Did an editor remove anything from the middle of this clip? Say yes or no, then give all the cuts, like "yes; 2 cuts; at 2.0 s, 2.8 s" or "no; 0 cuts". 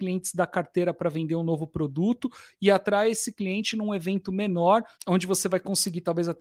yes; 1 cut; at 4.9 s